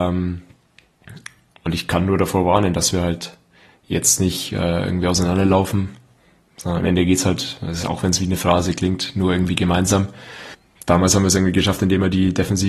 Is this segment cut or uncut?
uncut